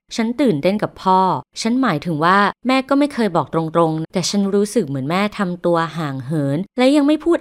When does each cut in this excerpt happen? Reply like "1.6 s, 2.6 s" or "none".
4.0 s